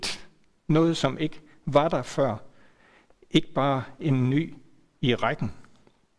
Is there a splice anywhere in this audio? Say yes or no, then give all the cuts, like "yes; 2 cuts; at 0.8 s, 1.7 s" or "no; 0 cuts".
no; 0 cuts